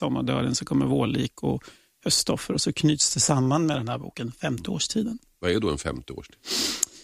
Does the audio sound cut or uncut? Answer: uncut